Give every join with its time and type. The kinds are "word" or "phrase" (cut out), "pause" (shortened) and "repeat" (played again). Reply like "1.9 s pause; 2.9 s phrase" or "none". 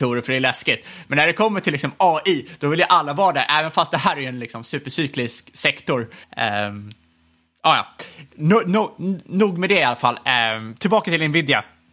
6.2 s pause